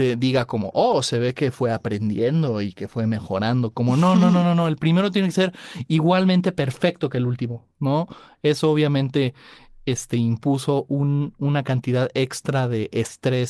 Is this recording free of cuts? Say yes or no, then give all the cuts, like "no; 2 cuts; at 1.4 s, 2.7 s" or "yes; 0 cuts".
yes; 0 cuts